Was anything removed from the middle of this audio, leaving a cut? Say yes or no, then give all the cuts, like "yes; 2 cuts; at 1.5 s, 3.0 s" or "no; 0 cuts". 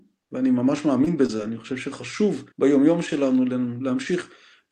yes; 1 cut; at 2.5 s